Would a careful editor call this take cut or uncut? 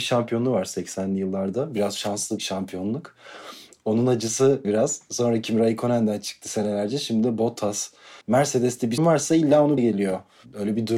cut